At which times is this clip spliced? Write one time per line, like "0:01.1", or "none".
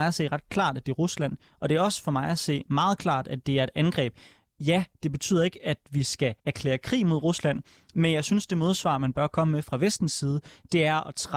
0:06.4